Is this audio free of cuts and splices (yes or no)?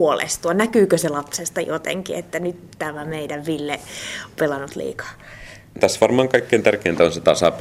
no